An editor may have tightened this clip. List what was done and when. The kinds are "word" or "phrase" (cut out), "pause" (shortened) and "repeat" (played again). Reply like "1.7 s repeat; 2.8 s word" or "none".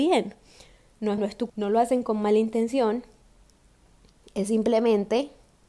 1.2 s phrase; 1.5 s word